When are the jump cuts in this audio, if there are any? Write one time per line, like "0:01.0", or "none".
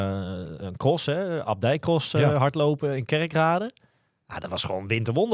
none